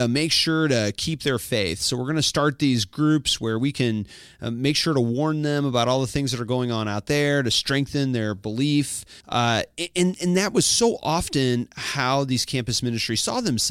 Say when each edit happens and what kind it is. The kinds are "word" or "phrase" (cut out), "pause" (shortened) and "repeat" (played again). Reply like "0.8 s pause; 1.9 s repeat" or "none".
9.2 s pause